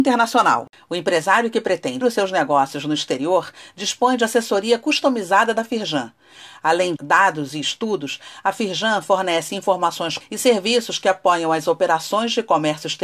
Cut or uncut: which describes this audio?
cut